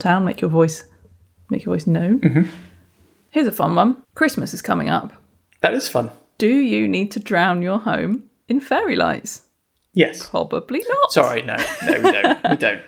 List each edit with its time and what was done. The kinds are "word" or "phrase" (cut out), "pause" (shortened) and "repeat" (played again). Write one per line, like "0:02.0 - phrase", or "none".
0:04.0 - pause
0:09.5 - pause